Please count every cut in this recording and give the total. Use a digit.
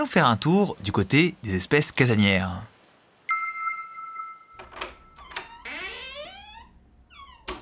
0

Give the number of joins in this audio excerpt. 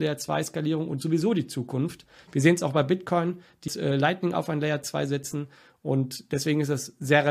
1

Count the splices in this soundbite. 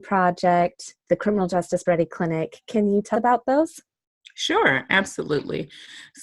3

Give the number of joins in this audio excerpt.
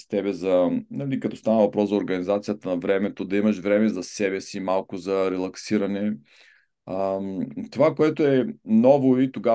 0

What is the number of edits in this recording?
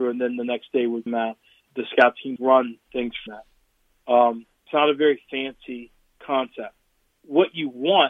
7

